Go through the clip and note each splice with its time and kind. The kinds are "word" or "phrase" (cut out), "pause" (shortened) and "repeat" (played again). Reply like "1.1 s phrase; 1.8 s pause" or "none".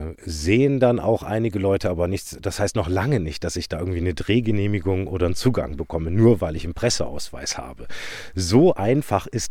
none